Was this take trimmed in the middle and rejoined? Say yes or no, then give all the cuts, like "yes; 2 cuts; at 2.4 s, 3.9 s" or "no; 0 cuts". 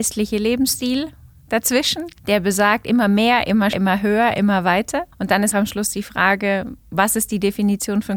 yes; 5 cuts; at 2.2 s, 3.7 s, 5.1 s, 5.5 s, 6.8 s